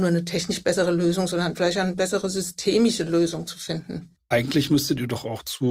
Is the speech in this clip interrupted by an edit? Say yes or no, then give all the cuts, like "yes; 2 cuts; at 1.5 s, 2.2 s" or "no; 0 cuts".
no; 0 cuts